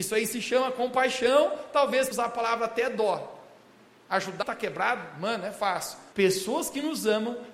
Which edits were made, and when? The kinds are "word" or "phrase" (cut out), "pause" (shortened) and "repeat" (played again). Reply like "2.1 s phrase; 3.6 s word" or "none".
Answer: 2.1 s word; 4.4 s phrase; 6.1 s pause